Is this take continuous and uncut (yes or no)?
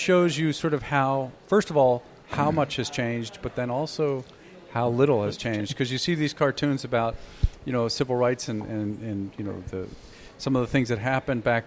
yes